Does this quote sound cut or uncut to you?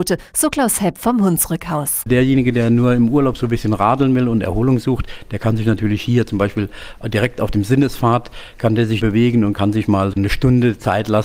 cut